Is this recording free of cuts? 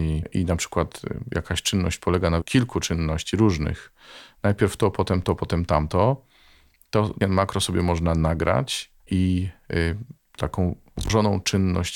no; 3 cuts; at 2.4 s, 7.2 s, 9.0 s

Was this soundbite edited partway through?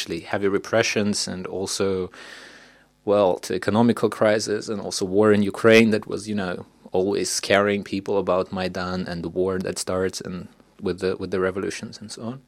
no; 0 cuts

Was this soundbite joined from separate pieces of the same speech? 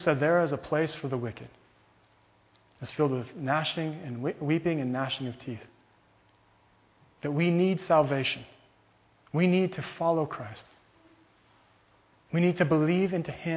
no; 0 cuts

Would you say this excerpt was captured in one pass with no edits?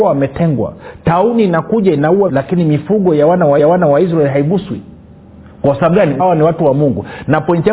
no; 3 cuts; at 2.3 s, 3.6 s, 6.2 s

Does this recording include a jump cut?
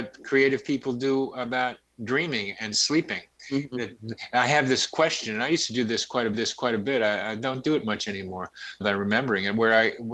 yes; 2 cuts; at 6.3 s, 8.8 s

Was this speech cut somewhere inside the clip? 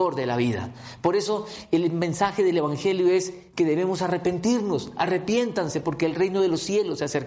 no; 0 cuts

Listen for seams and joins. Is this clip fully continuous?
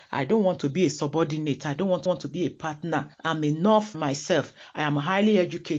no; 3 cuts; at 2.1 s, 3.1 s, 3.9 s

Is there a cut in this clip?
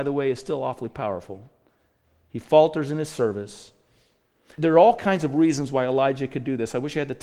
no; 0 cuts

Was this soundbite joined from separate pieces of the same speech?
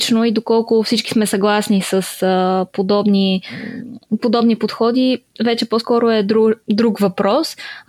yes; 1 cut; at 6.6 s

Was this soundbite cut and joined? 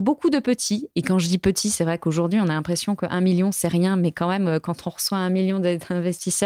no; 0 cuts

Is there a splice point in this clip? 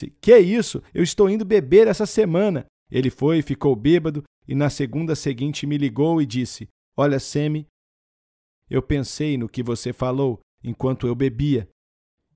no; 0 cuts

